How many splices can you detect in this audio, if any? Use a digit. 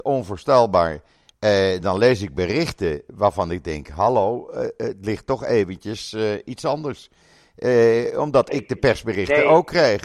0